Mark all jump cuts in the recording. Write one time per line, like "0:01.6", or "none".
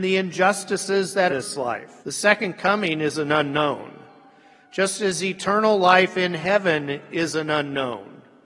0:01.3
0:02.0